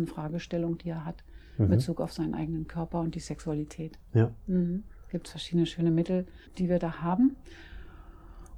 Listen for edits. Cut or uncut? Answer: cut